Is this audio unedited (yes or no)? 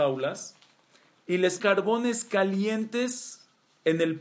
no